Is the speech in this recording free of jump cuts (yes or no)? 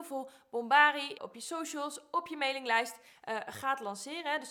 no